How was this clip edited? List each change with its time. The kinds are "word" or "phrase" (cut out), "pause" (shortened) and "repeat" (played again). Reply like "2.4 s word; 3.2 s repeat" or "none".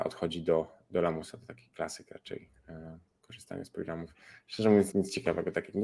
4.9 s word